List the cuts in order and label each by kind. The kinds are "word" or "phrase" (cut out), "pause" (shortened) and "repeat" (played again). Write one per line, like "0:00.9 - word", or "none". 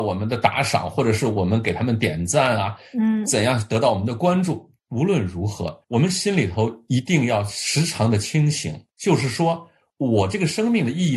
0:04.8 - pause
0:05.8 - pause
0:08.9 - pause